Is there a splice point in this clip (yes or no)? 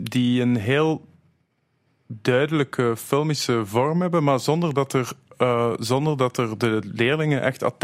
no